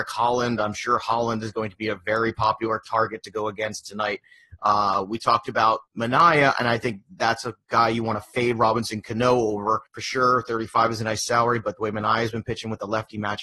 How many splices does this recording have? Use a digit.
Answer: 2